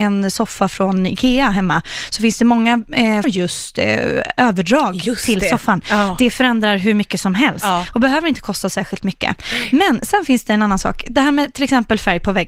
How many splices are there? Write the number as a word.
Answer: one